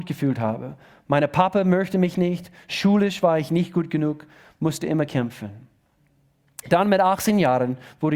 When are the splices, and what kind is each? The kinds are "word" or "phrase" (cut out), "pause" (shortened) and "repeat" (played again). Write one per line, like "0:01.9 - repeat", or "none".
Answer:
none